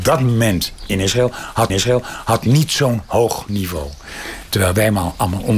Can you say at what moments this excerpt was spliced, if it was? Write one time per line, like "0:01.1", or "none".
0:01.7